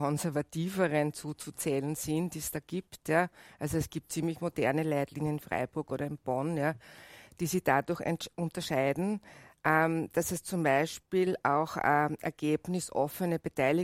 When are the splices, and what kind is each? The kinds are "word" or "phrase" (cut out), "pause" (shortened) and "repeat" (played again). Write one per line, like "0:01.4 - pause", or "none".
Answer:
none